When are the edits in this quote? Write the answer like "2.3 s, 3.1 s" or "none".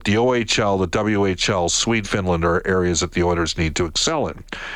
2.0 s